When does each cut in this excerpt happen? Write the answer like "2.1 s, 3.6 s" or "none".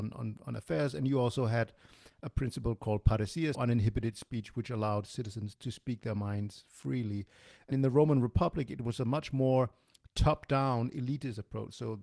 3.5 s, 5.5 s, 7.7 s